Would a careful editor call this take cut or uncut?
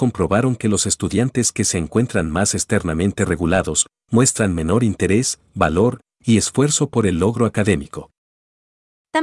uncut